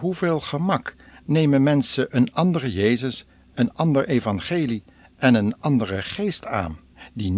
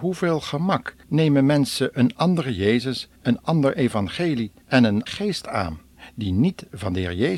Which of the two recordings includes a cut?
second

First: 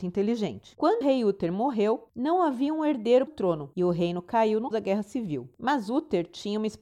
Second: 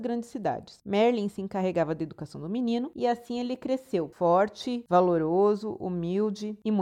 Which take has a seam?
first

